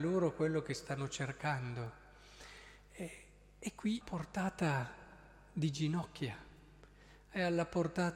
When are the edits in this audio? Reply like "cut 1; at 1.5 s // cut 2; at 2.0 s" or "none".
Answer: cut 1; at 4.0 s